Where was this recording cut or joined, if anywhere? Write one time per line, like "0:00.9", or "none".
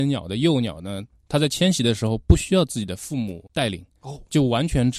0:01.1
0:04.0